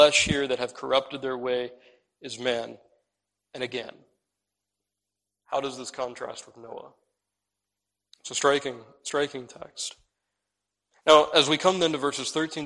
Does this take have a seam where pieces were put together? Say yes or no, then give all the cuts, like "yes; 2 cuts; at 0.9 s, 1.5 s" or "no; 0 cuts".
no; 0 cuts